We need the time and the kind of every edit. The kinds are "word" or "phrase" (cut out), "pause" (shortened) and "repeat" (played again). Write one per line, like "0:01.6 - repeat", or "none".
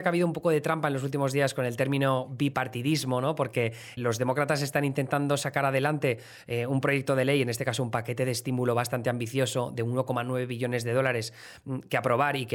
0:04.0 - word